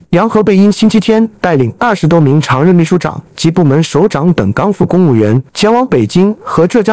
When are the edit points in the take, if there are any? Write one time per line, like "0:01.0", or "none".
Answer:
0:05.5